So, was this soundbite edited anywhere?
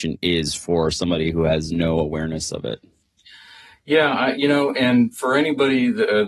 no; 0 cuts

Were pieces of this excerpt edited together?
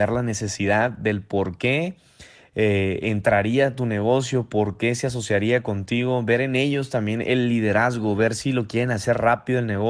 no; 0 cuts

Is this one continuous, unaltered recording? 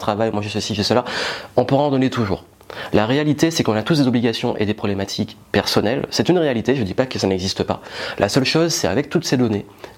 yes; 0 cuts

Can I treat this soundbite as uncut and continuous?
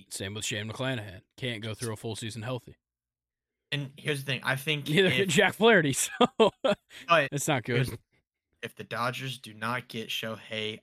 yes; 0 cuts

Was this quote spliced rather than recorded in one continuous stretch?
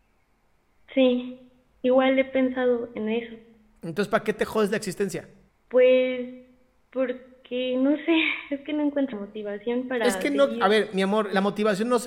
yes; 2 cuts; at 5.5 s, 9.1 s

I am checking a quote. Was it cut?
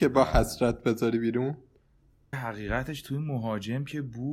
yes; 1 cut; at 2.3 s

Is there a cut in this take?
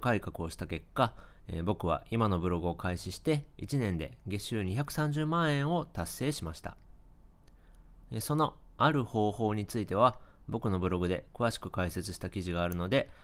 no; 0 cuts

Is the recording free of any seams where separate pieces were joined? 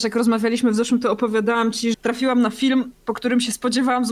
no; 2 cuts; at 1.0 s, 1.9 s

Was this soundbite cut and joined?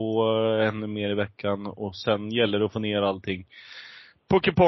no; 0 cuts

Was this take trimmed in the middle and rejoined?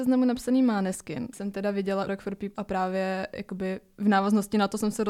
yes; 3 cuts; at 1.3 s, 2.1 s, 2.5 s

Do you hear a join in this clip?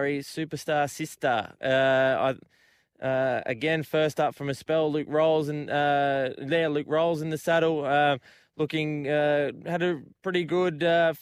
no; 0 cuts

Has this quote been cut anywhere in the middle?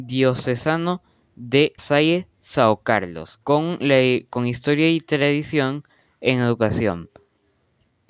yes; 2 cuts; at 1.8 s, 3.4 s

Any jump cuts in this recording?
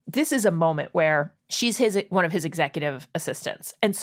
yes; 1 cut; at 1.4 s

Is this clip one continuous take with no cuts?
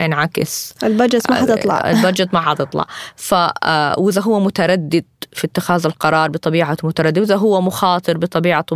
yes; 0 cuts

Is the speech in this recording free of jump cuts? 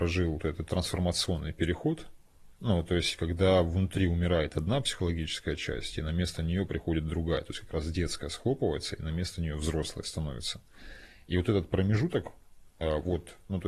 no; 2 cuts; at 2.6 s, 12.7 s

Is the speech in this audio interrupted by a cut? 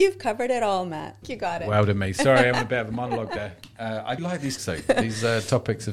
yes; 4 cuts; at 1.2 s, 2.5 s, 4.2 s, 4.6 s

